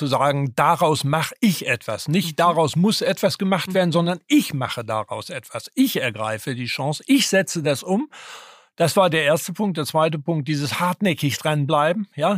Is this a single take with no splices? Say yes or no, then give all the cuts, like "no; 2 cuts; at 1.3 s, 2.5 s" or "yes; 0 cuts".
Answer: yes; 0 cuts